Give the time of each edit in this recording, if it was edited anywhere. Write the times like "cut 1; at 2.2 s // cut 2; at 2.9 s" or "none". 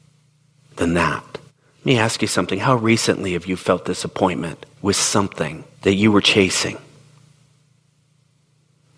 cut 1; at 1.5 s // cut 2; at 4.7 s // cut 3; at 5.7 s